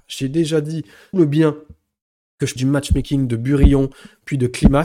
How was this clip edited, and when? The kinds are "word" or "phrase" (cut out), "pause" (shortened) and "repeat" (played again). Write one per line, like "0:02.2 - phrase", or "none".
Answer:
0:01.1 - word
0:02.6 - word